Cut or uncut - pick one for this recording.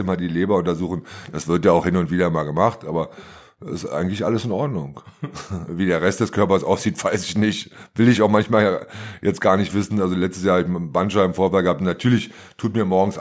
uncut